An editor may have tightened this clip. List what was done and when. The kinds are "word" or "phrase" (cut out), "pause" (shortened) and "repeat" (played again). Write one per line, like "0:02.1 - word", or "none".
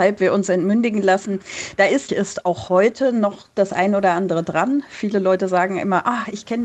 0:02.1 - phrase